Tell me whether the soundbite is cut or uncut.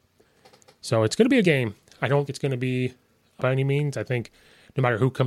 cut